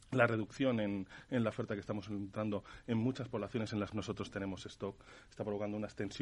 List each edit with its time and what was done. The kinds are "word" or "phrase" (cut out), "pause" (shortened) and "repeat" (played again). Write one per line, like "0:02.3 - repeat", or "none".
0:03.9 - word